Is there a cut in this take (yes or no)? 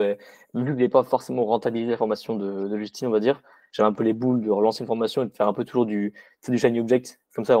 no